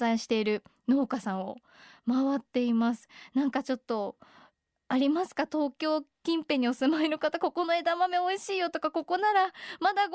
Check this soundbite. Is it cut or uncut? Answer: uncut